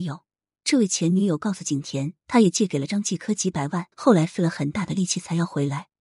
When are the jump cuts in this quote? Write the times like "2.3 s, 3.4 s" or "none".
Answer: 2.2 s, 3.9 s